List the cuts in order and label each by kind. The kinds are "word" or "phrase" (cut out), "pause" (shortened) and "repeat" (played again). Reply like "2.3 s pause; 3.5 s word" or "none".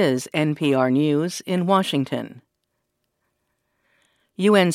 none